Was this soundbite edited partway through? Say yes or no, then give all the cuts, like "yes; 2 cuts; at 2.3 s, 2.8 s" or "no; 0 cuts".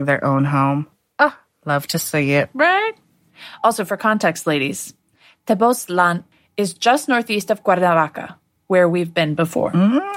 no; 0 cuts